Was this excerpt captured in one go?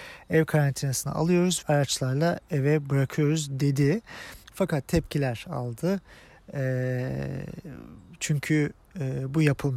no; 2 cuts; at 1.6 s, 4.4 s

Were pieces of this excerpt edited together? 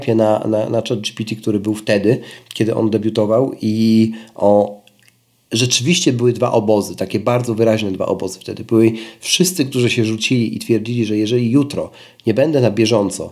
no; 0 cuts

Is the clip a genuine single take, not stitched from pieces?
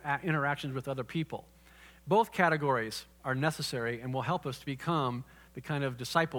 no; 1 cut; at 3.1 s

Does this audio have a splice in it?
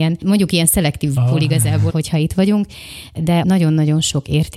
yes; 3 cuts; at 1.2 s, 1.9 s, 3.4 s

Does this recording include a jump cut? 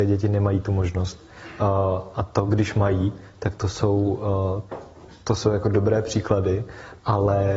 no; 0 cuts

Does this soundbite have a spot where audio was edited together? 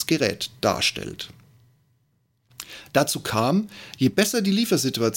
no; 0 cuts

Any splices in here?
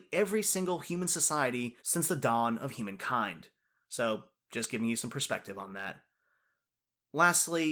yes; 1 cut; at 1.8 s

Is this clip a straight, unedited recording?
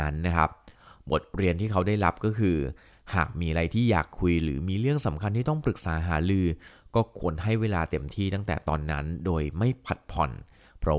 yes; 0 cuts

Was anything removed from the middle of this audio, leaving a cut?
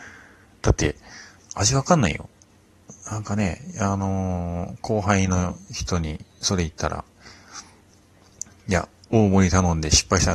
no; 0 cuts

